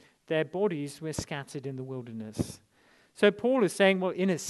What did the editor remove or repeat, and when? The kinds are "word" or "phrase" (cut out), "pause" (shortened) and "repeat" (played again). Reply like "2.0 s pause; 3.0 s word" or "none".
none